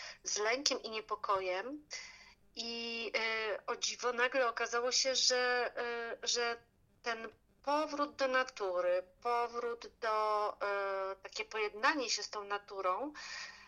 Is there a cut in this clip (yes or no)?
no